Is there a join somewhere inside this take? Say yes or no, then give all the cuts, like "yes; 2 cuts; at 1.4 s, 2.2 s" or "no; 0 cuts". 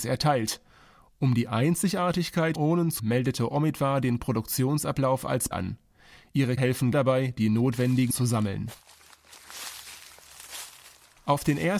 yes; 7 cuts; at 2.5 s, 3.0 s, 4.2 s, 5.5 s, 6.6 s, 6.9 s, 8.1 s